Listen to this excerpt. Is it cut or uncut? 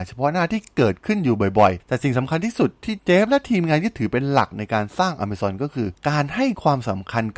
uncut